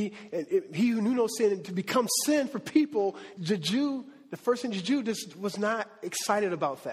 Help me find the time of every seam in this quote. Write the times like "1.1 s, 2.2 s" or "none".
3.4 s